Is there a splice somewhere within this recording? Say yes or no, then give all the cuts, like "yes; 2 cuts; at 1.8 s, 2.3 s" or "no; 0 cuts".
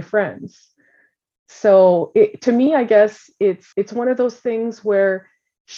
yes; 1 cut; at 3.7 s